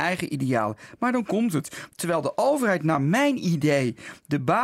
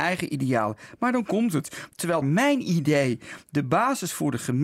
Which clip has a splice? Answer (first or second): second